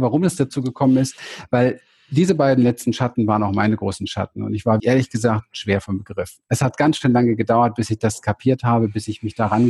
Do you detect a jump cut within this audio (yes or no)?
yes